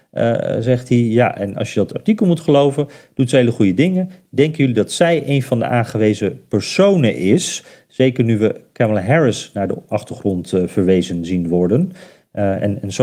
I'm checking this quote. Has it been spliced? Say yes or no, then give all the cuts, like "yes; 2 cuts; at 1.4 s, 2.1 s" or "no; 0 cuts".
no; 0 cuts